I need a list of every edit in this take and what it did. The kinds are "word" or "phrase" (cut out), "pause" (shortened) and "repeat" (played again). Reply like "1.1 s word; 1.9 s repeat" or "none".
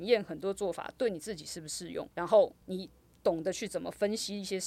2.1 s pause; 2.6 s pause